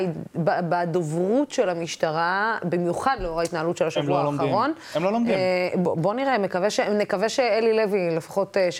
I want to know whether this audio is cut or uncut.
uncut